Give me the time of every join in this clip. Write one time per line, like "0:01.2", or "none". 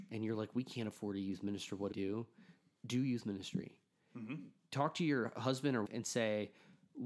0:01.9
0:05.8